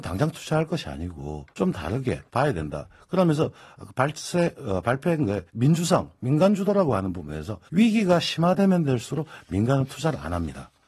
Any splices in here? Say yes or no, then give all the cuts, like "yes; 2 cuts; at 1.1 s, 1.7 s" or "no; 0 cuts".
yes; 4 cuts; at 1.5 s, 2.3 s, 5.5 s, 7.7 s